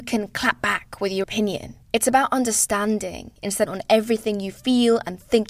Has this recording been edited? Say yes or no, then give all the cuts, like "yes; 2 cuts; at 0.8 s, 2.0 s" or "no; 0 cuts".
yes; 3 cuts; at 1.2 s, 1.8 s, 3.7 s